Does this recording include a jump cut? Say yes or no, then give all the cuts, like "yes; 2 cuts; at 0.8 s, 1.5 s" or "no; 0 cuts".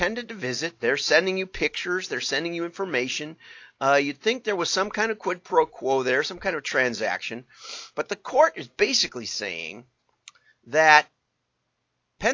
no; 0 cuts